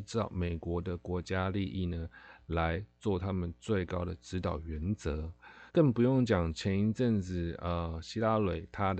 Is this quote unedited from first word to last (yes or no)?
no